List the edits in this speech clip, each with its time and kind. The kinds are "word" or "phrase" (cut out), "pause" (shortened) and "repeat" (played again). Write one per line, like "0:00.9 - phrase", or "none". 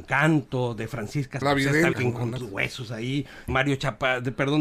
0:01.4 - word
0:01.9 - word
0:02.4 - word
0:03.5 - word